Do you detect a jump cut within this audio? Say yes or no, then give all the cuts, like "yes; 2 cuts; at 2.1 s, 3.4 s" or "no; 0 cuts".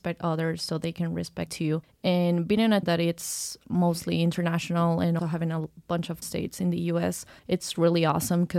yes; 5 cuts; at 1.5 s, 2.8 s, 5.2 s, 6.2 s, 7.4 s